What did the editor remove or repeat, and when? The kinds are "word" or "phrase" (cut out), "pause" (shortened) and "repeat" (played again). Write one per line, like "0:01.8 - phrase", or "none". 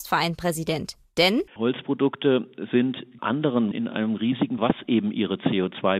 0:01.5 - pause
0:03.2 - word
0:03.7 - word
0:04.6 - word